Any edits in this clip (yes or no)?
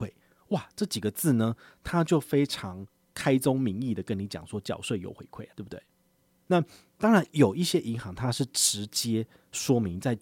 no